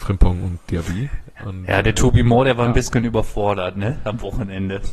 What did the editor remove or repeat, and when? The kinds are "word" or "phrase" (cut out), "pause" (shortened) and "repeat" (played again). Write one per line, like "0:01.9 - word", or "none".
none